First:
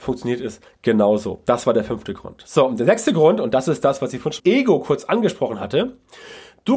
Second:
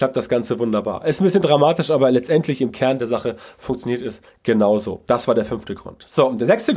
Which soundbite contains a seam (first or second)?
first